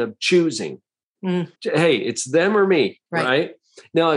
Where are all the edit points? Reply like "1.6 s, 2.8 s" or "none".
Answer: 1.6 s, 3.1 s